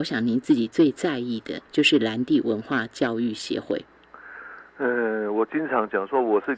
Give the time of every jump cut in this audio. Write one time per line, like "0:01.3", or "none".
0:01.7